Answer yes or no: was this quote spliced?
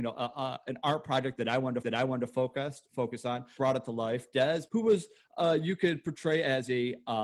yes